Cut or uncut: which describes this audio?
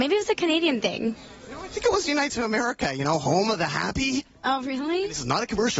cut